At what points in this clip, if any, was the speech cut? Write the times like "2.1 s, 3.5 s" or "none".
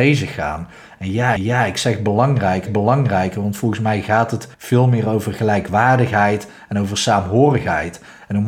1.4 s, 2.7 s, 4.5 s